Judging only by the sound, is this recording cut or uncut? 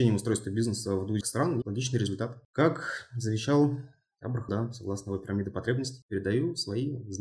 cut